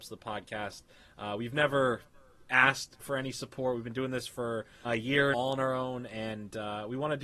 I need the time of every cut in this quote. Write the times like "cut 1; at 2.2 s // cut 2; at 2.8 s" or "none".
cut 1; at 4.8 s // cut 2; at 5.3 s